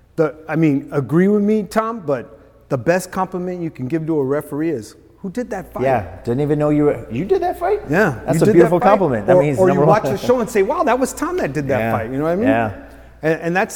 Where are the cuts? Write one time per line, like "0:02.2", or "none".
none